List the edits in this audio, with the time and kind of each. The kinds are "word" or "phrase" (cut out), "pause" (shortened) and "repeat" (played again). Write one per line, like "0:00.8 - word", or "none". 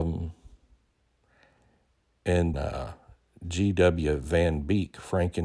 0:02.5 - word